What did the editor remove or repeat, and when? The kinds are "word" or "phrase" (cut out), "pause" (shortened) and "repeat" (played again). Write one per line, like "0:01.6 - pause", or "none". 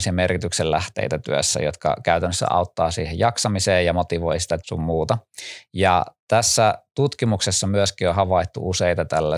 0:04.6 - word